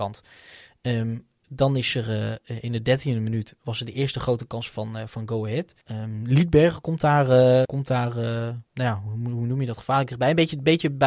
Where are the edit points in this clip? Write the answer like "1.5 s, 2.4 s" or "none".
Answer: 5.8 s, 7.6 s, 8.7 s